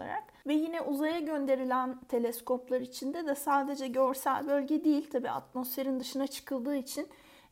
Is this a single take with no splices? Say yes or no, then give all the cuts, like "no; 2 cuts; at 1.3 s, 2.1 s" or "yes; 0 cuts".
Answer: yes; 0 cuts